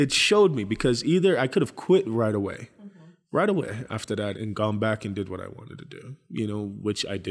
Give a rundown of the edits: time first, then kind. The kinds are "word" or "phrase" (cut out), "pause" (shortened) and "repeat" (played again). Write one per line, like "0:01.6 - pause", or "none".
0:04.3 - word